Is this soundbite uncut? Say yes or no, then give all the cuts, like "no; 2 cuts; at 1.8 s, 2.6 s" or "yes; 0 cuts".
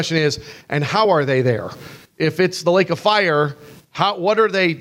yes; 0 cuts